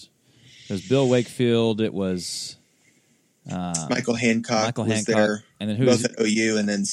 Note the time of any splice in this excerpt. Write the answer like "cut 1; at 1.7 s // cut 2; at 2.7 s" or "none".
none